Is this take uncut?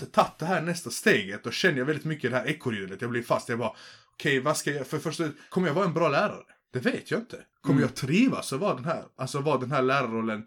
yes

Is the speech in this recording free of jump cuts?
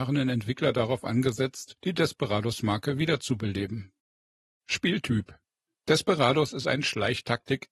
yes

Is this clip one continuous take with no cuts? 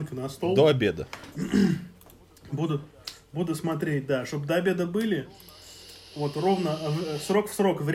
yes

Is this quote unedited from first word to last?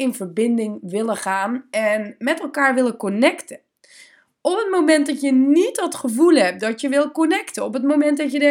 yes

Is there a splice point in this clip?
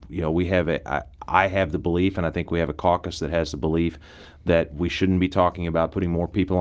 no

